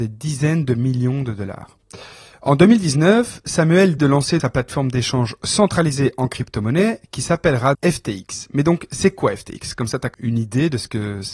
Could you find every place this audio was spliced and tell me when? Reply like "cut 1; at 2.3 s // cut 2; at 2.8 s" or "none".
cut 1; at 4.0 s // cut 2; at 4.4 s // cut 3; at 7.7 s // cut 4; at 10.1 s